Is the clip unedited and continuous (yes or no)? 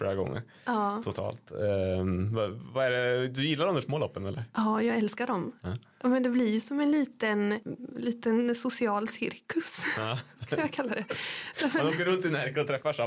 yes